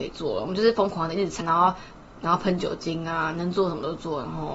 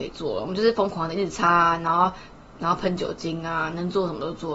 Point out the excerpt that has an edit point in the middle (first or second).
first